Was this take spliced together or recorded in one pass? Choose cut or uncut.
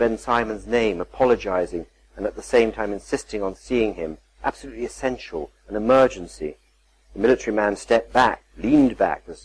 uncut